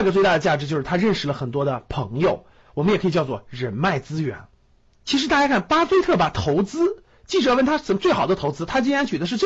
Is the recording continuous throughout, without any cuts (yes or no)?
yes